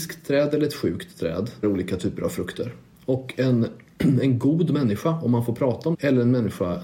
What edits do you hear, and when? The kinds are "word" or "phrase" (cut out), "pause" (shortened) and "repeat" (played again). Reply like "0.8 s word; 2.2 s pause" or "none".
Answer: 1.6 s word; 2.9 s pause; 5.9 s word